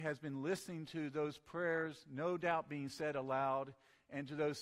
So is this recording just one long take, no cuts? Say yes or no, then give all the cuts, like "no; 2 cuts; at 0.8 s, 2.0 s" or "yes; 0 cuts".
yes; 0 cuts